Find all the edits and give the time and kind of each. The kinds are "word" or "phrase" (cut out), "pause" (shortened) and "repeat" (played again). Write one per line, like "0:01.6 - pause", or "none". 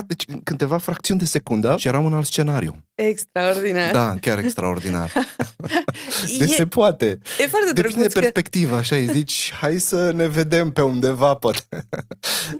none